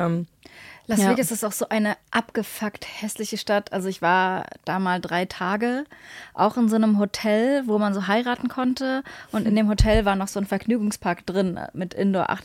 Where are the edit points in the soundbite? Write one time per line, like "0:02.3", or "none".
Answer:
none